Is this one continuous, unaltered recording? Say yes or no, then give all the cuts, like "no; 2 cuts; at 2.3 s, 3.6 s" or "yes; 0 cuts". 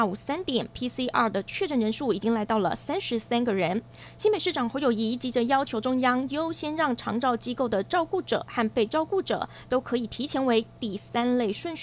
yes; 0 cuts